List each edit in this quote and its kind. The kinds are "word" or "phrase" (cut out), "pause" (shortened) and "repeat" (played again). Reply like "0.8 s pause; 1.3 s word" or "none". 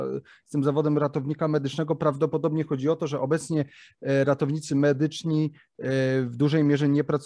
none